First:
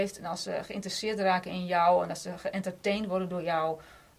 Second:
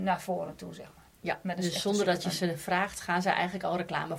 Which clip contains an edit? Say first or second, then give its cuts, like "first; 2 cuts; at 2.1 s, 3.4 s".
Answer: second; 1 cut; at 1.1 s